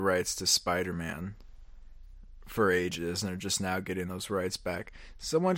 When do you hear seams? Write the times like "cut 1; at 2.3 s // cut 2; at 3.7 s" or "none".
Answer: none